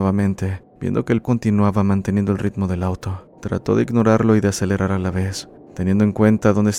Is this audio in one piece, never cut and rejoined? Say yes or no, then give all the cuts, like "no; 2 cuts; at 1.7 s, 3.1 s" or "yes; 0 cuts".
no; 2 cuts; at 1.2 s, 3.3 s